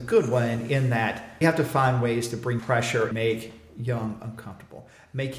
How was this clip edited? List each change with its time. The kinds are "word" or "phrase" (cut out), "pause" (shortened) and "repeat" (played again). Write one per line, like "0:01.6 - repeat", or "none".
0:01.4 - word
0:02.6 - word
0:03.1 - word